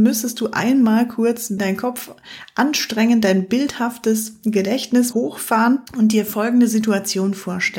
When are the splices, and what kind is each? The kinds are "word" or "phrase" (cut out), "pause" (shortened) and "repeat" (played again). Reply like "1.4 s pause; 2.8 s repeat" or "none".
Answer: 1.6 s word; 5.1 s word; 5.9 s pause